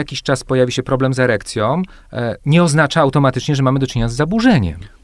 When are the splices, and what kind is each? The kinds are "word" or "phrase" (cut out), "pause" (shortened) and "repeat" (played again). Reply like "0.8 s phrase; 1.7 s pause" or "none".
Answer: none